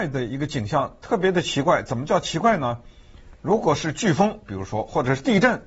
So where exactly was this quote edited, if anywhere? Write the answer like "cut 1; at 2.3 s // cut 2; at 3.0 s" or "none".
none